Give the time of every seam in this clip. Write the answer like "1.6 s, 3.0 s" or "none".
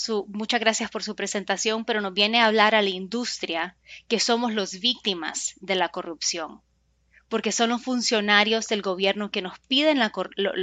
none